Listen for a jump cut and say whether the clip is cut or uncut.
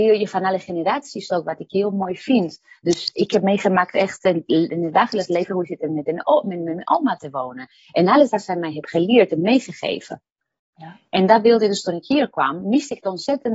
uncut